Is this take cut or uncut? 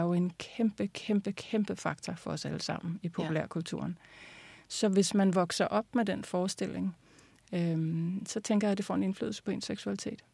uncut